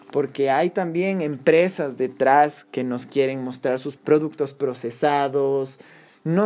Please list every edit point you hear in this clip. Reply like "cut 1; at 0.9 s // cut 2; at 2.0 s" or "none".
cut 1; at 4.0 s